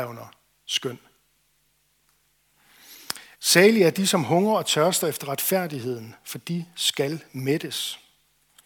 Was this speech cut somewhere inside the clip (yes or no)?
yes